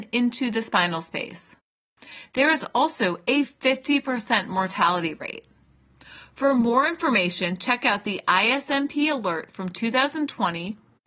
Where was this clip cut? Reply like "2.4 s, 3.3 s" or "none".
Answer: none